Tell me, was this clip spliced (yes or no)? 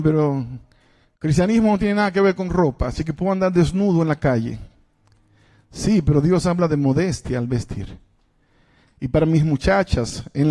no